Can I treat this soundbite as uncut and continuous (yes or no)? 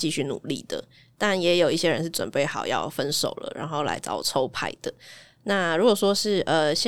yes